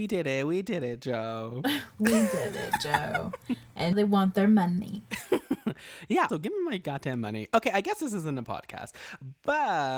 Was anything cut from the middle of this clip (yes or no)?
yes